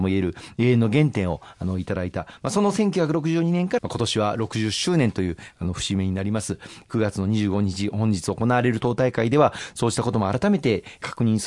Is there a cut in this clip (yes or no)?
yes